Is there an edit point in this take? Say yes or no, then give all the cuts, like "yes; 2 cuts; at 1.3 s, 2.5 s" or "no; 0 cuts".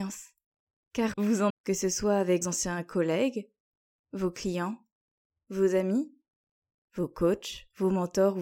yes; 3 cuts; at 1.1 s, 1.5 s, 2.4 s